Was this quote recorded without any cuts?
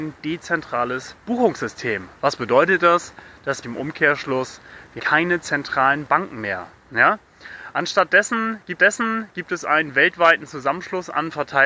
no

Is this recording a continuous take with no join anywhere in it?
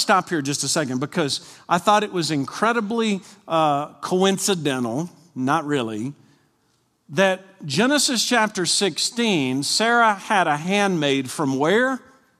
yes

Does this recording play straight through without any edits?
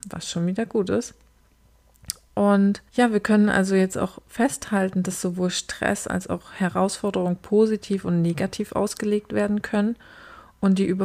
no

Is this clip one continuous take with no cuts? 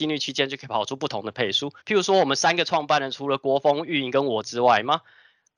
no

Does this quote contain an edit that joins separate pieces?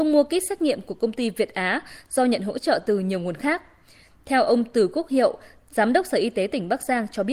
no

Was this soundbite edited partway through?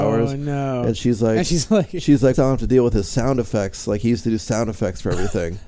yes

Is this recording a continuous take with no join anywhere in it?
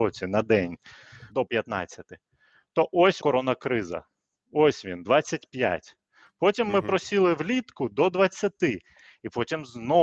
no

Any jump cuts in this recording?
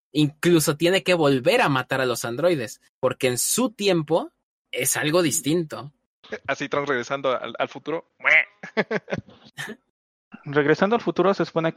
yes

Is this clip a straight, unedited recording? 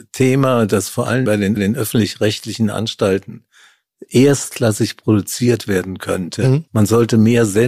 no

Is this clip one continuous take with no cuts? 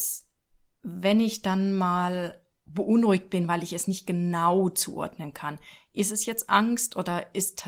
yes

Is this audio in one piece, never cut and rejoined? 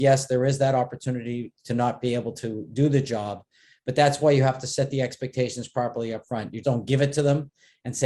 no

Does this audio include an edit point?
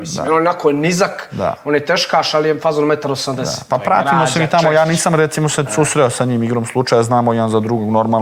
no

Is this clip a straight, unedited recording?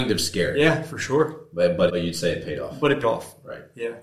no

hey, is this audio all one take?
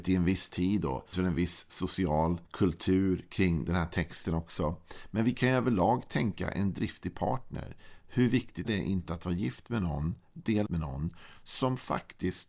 no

